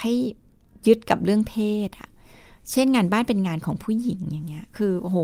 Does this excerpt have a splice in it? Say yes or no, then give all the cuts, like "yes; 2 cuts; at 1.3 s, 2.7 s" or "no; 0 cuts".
no; 0 cuts